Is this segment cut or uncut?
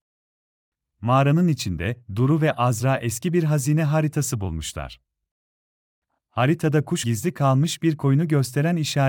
cut